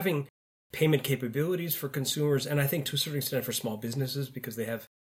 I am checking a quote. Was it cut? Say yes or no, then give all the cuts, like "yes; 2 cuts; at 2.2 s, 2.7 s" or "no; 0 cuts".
no; 0 cuts